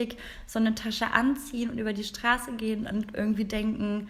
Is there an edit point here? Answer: no; 0 cuts

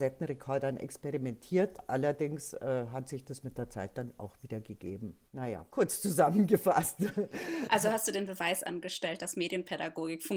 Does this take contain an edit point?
no; 0 cuts

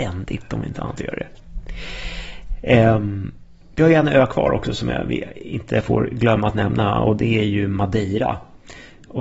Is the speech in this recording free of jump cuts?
yes; 0 cuts

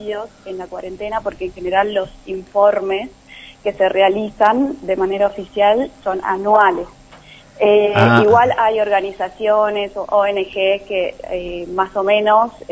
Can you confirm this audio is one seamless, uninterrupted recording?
yes; 0 cuts

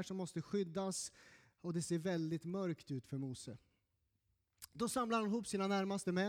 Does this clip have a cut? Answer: no; 0 cuts

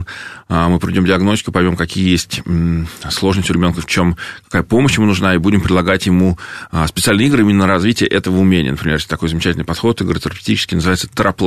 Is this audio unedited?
yes; 0 cuts

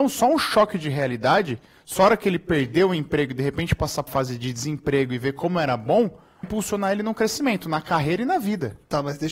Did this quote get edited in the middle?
yes; 2 cuts; at 4.1 s, 6.4 s

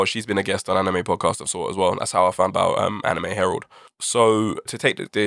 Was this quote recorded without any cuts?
no; 2 cuts; at 1.4 s, 2.5 s

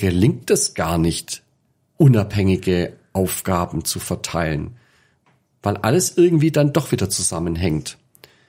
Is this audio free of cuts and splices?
yes; 0 cuts

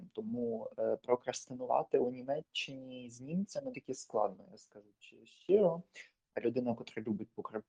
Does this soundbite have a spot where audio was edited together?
yes; 1 cut; at 3.7 s

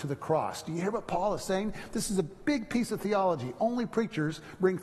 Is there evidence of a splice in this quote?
no; 0 cuts

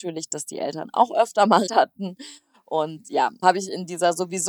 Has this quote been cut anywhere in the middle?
yes; 2 cuts; at 1.7 s, 3.4 s

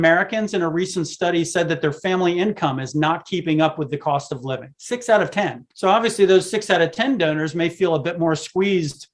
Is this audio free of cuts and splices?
no; 1 cut; at 5.7 s

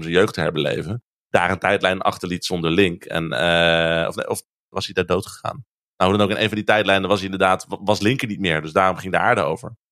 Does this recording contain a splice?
no; 0 cuts

